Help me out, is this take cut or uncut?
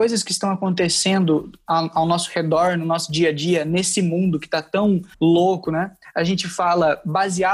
cut